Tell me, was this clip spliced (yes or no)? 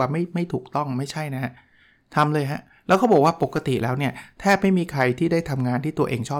no